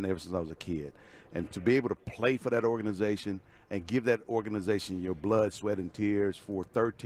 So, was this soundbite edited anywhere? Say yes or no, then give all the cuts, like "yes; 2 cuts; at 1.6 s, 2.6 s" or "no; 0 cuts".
no; 0 cuts